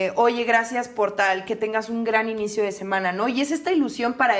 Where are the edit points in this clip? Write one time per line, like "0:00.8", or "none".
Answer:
none